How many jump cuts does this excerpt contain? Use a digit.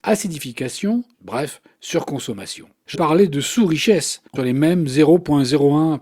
3